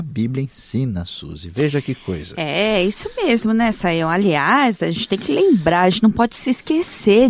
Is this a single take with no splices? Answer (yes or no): yes